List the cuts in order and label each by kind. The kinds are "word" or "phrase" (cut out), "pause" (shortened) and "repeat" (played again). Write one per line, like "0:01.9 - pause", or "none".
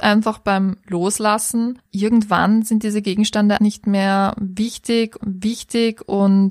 0:01.9 - word
0:03.6 - word
0:05.2 - repeat